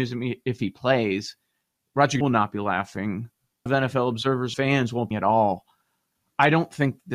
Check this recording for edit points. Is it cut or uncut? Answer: cut